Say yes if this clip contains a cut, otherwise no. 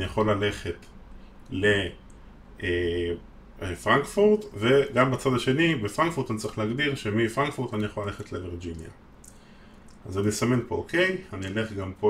no